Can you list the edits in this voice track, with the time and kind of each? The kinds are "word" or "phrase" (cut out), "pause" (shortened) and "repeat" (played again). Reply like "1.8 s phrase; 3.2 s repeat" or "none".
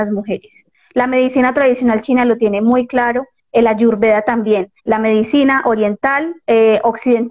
4.8 s pause